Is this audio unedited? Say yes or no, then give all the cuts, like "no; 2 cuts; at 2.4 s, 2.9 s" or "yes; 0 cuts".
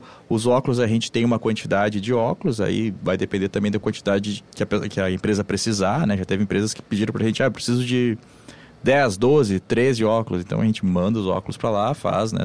no; 1 cut; at 4.5 s